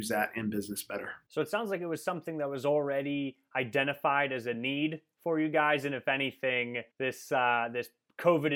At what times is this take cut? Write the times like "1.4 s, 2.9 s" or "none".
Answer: 1.3 s, 6.9 s

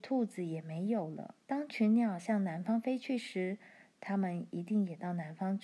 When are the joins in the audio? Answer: 1.4 s

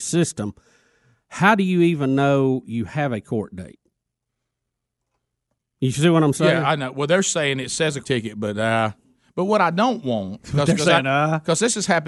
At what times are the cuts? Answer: 8.0 s

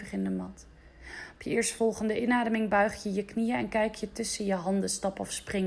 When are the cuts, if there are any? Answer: none

